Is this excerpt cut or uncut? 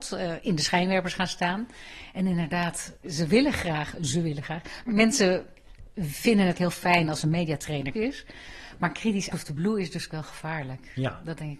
cut